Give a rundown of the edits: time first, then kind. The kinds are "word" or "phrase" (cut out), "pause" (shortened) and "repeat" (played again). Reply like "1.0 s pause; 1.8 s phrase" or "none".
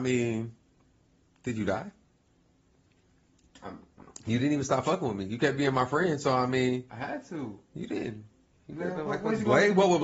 none

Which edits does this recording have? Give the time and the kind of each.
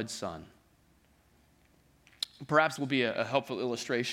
2.8 s word

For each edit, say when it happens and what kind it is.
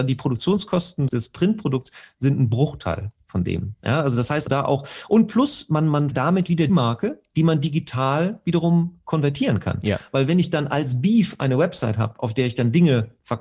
1.1 s word; 4.5 s word; 6.1 s word; 6.7 s word

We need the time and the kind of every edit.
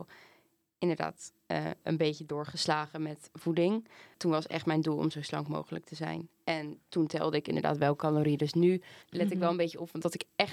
9.0 s pause

